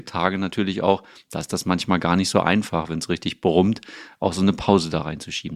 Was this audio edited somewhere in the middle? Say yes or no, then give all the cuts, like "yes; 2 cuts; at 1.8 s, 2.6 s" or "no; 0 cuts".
no; 0 cuts